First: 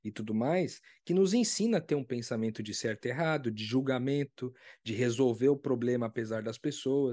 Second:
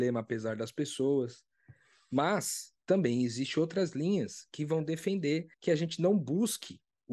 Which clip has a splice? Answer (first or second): second